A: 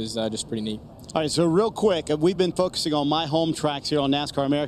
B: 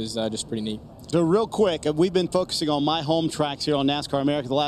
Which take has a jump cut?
B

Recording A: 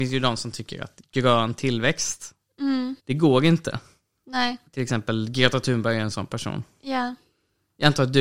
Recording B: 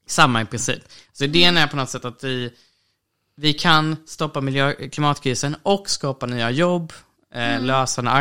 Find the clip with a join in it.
A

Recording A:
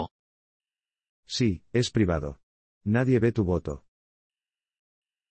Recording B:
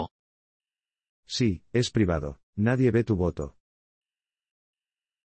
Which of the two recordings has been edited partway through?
B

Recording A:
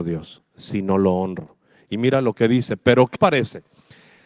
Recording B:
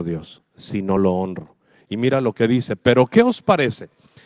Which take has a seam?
A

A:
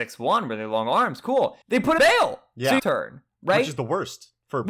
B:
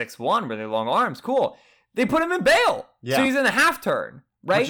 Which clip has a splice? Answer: A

